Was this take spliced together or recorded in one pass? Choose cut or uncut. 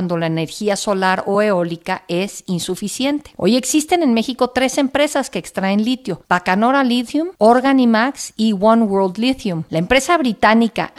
uncut